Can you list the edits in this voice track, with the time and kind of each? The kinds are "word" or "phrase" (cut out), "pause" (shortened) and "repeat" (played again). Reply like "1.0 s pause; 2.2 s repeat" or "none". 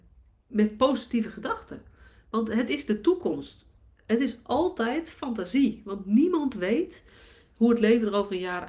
none